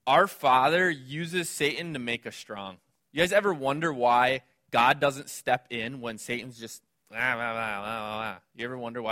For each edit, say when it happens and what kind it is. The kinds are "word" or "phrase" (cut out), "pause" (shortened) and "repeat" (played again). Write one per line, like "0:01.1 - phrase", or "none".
0:02.9 - pause
0:06.9 - pause